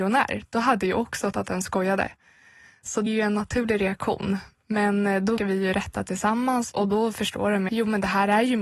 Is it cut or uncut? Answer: cut